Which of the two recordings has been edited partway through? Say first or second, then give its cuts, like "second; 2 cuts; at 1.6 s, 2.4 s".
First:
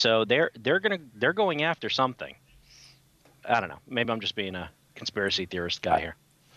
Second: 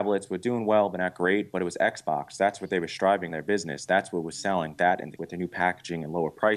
second; 2 cuts; at 3.3 s, 5.2 s